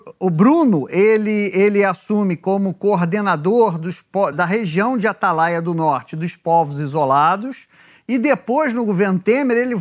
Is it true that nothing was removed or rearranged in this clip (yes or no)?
no